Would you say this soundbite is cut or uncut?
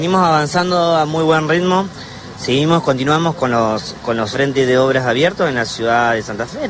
cut